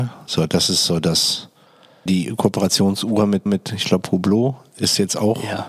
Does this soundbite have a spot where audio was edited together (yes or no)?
yes